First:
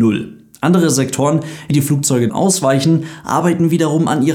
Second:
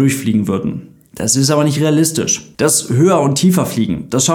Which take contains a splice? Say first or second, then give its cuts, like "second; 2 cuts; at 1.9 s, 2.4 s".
first; 2 cuts; at 1.7 s, 2.3 s